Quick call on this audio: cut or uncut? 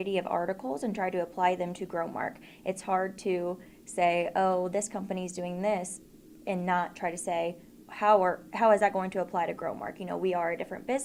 cut